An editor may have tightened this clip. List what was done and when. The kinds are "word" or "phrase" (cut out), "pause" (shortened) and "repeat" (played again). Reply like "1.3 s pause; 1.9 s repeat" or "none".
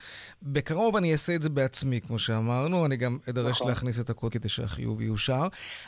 4.3 s word